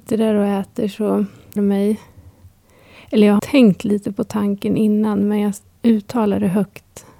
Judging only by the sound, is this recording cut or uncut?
cut